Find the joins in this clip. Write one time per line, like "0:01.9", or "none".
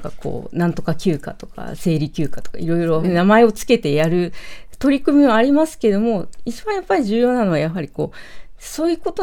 0:03.0